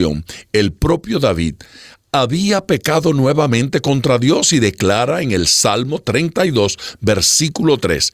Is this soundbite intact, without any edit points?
yes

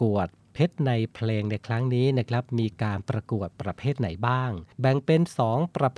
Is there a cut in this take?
yes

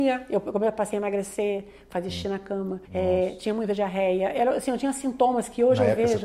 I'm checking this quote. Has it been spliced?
yes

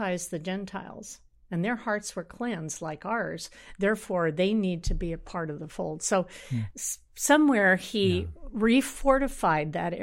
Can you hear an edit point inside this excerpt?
no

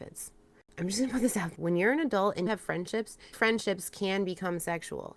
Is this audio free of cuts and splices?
no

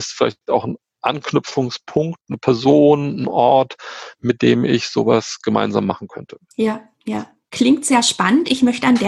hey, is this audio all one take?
yes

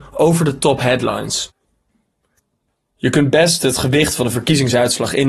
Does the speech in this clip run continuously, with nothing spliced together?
yes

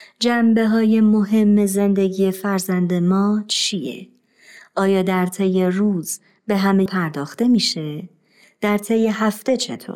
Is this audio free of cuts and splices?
no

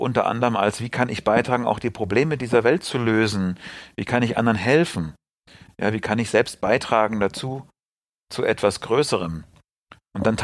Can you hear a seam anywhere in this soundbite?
no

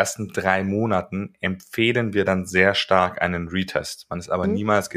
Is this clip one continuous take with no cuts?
yes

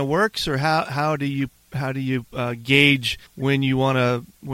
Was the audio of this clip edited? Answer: yes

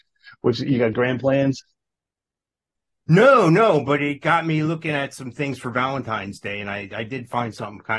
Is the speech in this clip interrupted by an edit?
no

